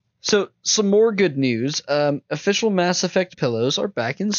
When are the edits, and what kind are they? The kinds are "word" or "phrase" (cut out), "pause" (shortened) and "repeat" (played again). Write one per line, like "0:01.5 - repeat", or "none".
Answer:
0:03.3 - word